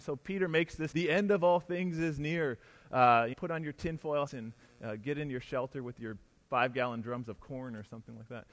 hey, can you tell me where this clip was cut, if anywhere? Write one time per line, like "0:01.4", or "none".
0:00.9
0:03.3
0:04.3

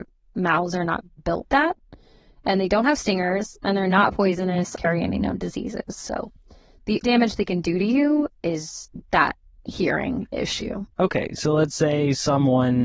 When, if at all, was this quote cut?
0:01.5
0:04.8
0:07.0
0:08.4

